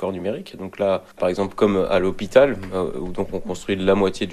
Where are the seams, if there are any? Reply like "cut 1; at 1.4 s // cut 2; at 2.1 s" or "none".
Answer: cut 1; at 1.1 s